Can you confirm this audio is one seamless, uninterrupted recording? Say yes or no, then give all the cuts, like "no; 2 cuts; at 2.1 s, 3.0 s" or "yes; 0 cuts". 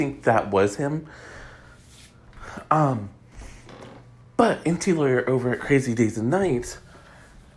yes; 0 cuts